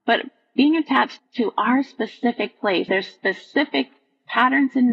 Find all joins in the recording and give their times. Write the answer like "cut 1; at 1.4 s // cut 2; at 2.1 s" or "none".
cut 1; at 1.2 s // cut 2; at 2.9 s